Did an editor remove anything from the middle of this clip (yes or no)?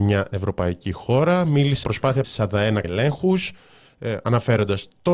yes